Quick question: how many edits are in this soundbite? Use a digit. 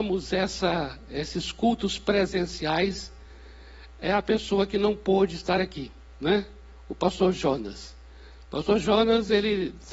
0